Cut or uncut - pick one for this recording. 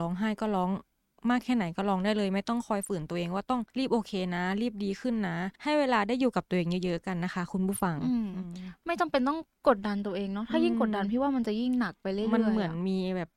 cut